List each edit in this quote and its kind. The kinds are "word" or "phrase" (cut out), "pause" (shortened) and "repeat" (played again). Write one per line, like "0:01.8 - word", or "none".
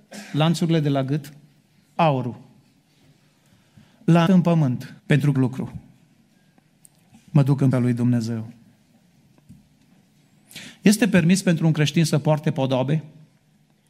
0:02.0 - word
0:04.3 - word
0:05.0 - pause
0:05.3 - phrase
0:07.7 - word